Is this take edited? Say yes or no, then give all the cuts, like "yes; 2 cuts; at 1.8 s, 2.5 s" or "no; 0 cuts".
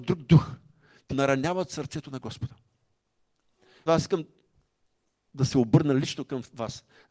yes; 2 cuts; at 1.1 s, 3.9 s